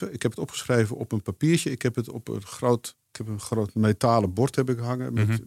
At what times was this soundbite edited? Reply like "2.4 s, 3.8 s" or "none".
3.0 s